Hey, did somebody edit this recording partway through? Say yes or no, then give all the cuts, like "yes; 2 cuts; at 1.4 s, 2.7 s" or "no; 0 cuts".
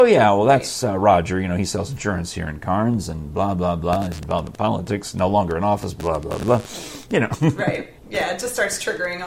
yes; 1 cut; at 8.0 s